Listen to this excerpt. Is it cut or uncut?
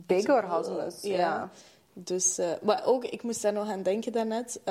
uncut